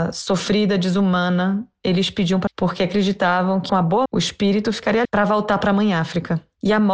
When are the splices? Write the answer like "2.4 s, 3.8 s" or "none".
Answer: 2.5 s, 3.7 s, 4.1 s, 5.0 s